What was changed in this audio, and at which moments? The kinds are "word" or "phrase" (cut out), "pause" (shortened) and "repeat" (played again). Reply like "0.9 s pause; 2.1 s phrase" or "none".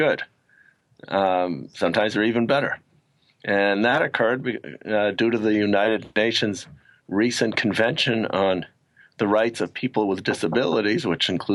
none

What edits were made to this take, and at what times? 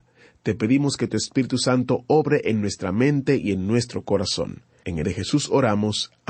5.0 s word

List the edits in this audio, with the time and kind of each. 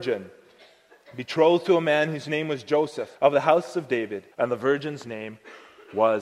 3.1 s pause; 4.3 s pause

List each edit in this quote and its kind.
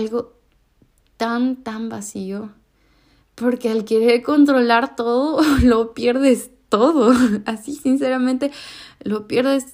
none

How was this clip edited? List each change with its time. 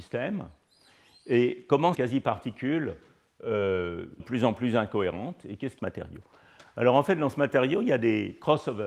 1.9 s word; 4.2 s phrase; 5.8 s phrase

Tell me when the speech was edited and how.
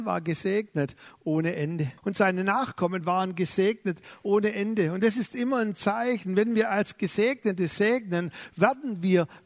2.0 s pause

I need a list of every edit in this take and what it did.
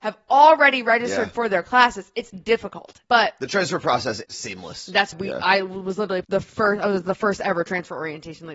2.3 s word; 3.0 s pause; 4.2 s word; 5.1 s word; 6.2 s phrase

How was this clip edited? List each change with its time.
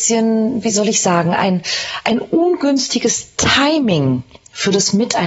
none

